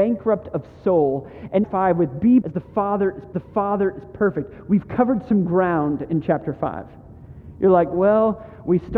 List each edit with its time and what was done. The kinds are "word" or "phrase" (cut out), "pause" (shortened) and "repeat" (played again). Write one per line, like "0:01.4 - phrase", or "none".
0:01.6 - phrase
0:02.4 - word
0:03.3 - repeat

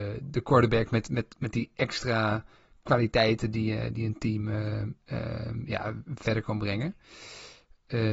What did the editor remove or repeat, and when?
none

